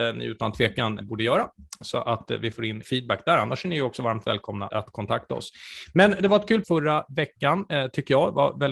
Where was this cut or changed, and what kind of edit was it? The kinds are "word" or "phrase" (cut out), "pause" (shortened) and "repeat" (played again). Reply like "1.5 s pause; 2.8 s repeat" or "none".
1.0 s word; 2.8 s word; 4.7 s word; 6.6 s word